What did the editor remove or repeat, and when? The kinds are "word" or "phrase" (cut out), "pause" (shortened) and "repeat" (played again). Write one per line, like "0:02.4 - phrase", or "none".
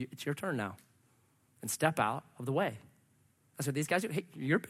none